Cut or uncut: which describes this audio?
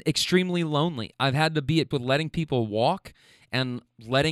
cut